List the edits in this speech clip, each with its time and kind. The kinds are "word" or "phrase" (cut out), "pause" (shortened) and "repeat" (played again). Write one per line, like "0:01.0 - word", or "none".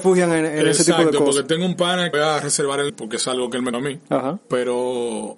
0:02.1 - phrase
0:02.9 - word
0:03.7 - word